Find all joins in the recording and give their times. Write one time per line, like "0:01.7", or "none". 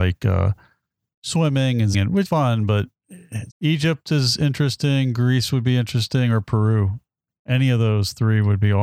0:01.9
0:02.3
0:03.5